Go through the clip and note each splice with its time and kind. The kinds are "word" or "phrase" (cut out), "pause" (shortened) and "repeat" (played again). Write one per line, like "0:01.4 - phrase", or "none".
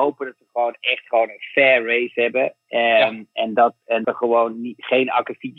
0:04.0 - word